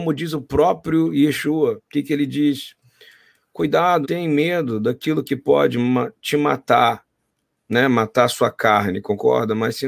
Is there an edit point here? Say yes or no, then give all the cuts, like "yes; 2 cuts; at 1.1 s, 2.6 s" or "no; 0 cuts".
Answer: yes; 2 cuts; at 1.8 s, 4.0 s